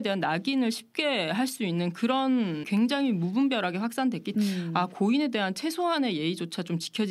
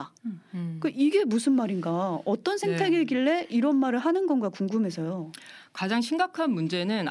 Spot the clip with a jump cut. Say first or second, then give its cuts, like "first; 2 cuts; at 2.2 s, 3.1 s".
first; 2 cuts; at 2.6 s, 4.3 s